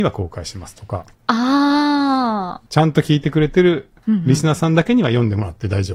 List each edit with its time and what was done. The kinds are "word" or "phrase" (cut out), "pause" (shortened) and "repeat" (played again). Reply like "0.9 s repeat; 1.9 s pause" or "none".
2.7 s pause